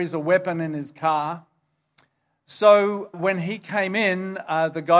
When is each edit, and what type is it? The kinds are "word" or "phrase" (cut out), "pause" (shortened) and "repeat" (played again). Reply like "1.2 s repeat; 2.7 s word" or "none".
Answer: 3.1 s word